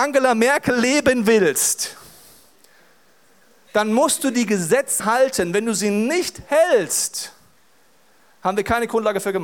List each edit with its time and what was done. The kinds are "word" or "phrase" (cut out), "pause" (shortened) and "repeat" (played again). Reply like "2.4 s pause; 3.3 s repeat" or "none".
5.0 s word